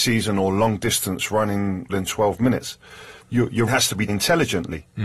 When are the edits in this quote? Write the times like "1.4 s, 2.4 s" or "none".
1.9 s, 3.2 s, 3.7 s, 4.1 s